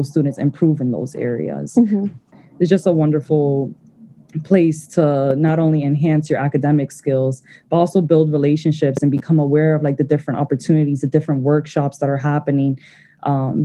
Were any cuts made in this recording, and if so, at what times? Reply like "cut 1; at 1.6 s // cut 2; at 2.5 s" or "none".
none